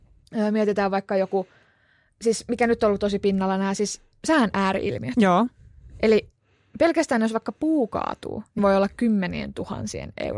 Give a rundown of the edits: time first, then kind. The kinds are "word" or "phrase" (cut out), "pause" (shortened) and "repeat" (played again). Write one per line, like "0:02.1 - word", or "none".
0:08.6 - word